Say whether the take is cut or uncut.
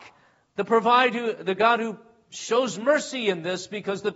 uncut